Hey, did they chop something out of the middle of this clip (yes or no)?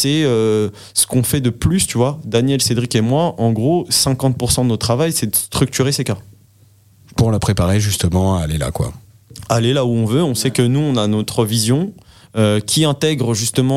no